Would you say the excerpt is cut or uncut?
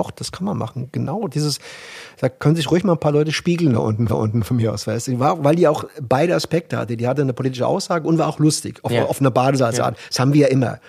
cut